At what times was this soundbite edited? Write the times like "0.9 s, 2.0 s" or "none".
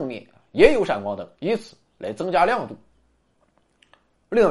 1.3 s

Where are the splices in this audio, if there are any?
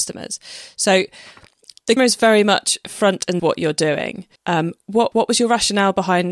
2.0 s, 3.4 s, 4.4 s, 5.1 s

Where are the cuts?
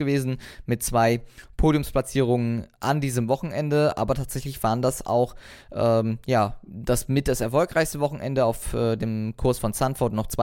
none

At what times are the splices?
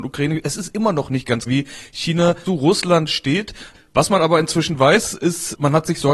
1.5 s, 2.5 s

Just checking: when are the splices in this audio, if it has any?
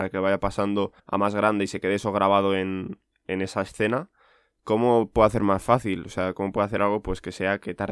1.0 s

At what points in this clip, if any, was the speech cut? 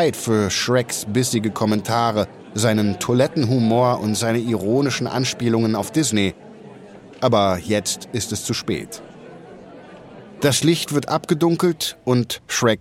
none

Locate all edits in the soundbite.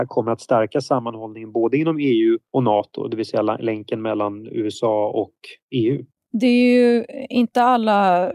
6.3 s

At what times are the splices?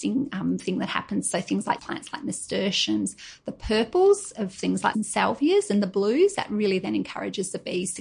1.8 s, 4.9 s

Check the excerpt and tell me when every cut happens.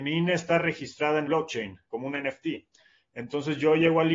1.2 s, 1.9 s

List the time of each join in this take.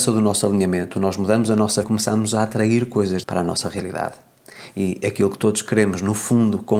1.8 s, 3.2 s

